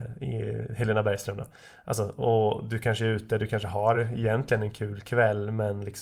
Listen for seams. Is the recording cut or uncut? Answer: uncut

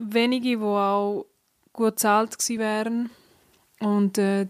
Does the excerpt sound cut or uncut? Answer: uncut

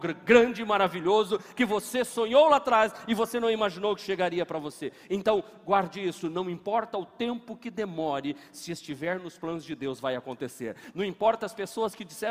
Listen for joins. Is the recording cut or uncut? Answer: uncut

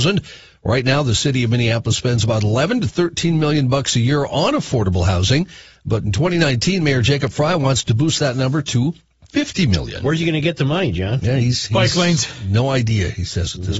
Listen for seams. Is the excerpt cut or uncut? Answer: uncut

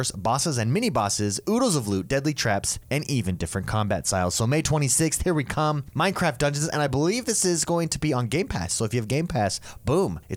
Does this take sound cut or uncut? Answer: uncut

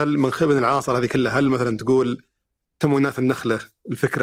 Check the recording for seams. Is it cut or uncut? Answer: uncut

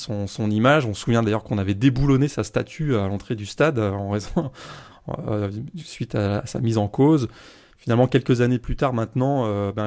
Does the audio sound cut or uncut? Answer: uncut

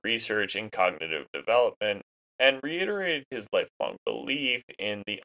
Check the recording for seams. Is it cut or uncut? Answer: uncut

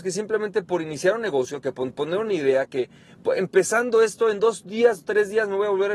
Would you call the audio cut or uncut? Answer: uncut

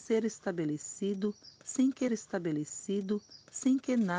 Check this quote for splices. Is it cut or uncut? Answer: cut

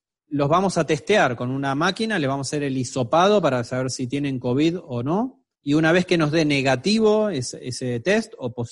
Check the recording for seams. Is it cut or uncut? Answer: cut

